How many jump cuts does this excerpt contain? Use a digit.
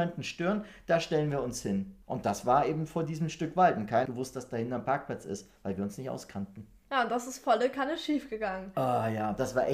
2